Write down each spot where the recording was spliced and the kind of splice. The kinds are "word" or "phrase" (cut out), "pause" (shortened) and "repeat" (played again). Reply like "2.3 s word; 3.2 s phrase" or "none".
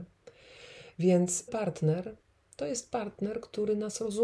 1.5 s word